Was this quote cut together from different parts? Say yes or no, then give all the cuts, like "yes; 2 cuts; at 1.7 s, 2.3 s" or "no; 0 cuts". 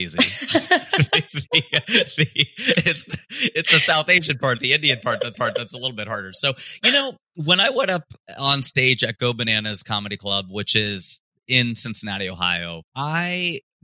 yes; 3 cuts; at 1.8 s, 5.3 s, 12.9 s